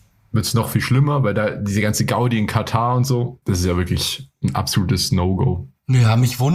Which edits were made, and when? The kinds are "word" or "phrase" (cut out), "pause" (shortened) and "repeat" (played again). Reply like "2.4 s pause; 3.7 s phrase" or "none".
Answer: 3.4 s pause